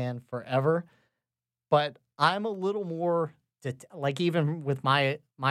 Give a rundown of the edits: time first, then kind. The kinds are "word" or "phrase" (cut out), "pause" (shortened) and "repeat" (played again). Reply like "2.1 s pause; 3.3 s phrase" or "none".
none